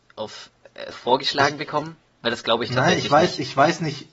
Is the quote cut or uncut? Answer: cut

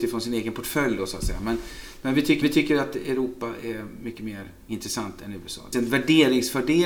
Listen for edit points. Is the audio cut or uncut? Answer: cut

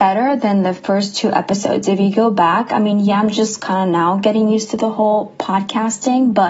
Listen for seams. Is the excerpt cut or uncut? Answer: uncut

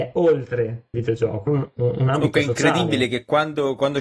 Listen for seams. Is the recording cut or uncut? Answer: cut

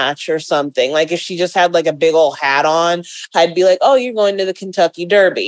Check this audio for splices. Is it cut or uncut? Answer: uncut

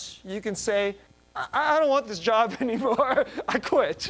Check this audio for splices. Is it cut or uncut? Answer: cut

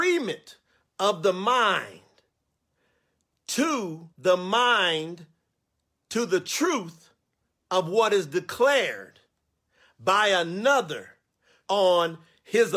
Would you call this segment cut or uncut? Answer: cut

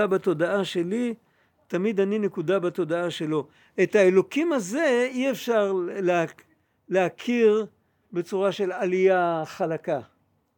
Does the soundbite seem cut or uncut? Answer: uncut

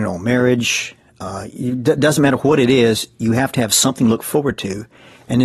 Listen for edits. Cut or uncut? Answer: uncut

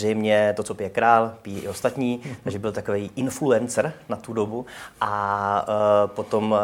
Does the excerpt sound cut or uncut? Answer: uncut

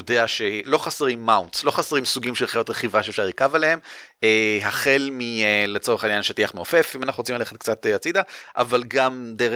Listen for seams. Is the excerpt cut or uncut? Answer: uncut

